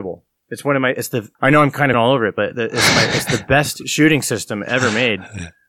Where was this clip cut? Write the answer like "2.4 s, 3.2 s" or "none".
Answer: 1.4 s, 1.9 s